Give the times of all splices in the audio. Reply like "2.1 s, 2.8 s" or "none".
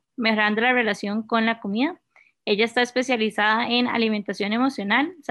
none